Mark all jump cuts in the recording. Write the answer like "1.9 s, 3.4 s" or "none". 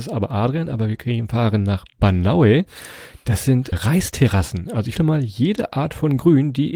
3.7 s, 5.0 s